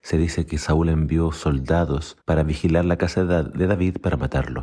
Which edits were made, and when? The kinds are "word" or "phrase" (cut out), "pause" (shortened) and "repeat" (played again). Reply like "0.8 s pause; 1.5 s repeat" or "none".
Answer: 2.2 s pause